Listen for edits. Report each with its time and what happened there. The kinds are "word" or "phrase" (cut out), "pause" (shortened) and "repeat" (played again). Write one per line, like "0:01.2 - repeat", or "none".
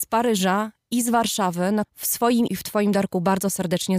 0:01.8 - word
0:02.5 - word